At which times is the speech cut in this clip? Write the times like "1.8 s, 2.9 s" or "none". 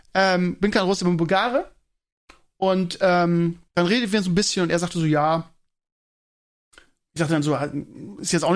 3.7 s